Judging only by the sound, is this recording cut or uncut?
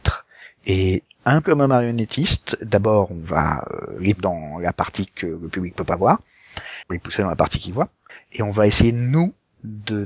cut